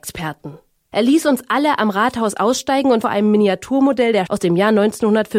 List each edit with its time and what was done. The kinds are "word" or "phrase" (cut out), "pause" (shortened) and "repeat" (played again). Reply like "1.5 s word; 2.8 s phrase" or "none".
3.0 s phrase; 4.3 s word